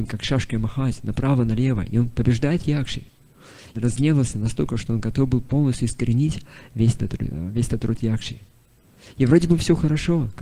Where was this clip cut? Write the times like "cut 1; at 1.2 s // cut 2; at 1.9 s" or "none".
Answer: cut 1; at 3.7 s